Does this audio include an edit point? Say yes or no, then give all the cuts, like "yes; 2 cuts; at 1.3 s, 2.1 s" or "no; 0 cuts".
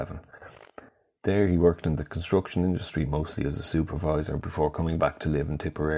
no; 0 cuts